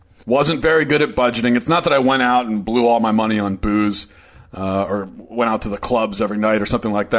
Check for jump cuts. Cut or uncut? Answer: uncut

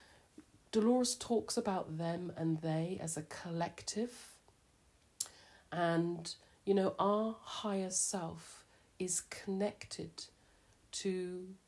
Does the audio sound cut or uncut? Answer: uncut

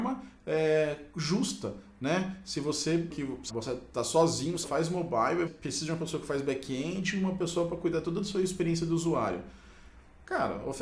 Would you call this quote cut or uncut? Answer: cut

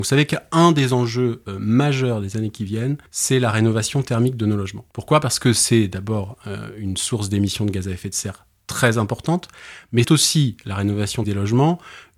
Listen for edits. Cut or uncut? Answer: cut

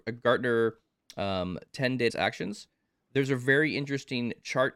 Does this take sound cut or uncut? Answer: cut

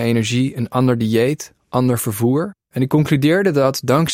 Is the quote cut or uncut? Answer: cut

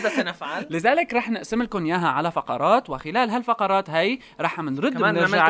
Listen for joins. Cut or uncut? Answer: uncut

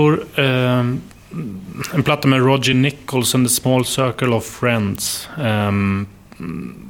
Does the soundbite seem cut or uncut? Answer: uncut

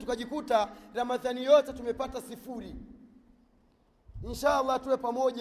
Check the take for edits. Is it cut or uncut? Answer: uncut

